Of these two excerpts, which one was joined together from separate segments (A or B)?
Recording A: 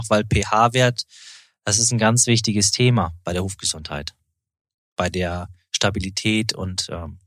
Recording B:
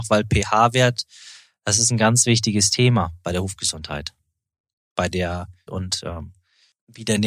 B